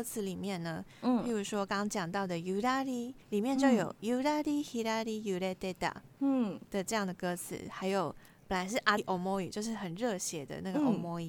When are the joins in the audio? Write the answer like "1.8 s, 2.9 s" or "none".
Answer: 3.2 s, 6.1 s, 9.0 s